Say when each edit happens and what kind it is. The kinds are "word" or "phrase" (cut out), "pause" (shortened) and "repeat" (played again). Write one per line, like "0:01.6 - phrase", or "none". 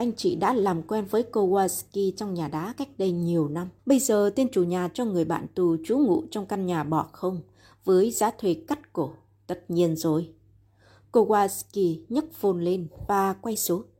0:03.8 - pause